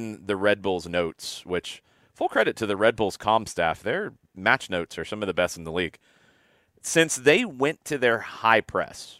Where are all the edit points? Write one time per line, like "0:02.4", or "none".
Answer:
none

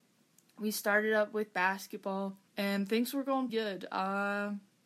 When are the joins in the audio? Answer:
0:02.5
0:03.5

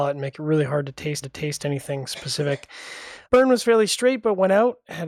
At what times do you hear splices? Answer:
0:01.2
0:03.3

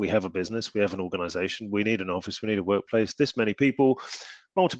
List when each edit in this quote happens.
none

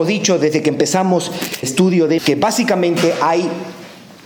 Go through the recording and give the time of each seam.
0:01.6
0:02.2

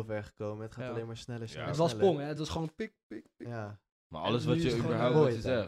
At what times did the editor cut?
none

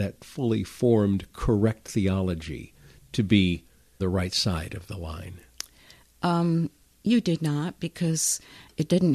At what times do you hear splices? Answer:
0:04.0

